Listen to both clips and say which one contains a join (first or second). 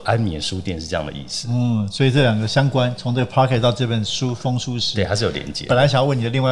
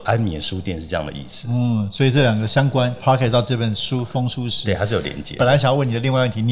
second